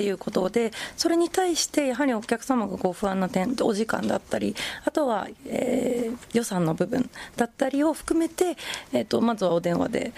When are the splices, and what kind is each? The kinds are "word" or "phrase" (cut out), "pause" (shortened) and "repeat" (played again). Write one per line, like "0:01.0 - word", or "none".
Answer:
none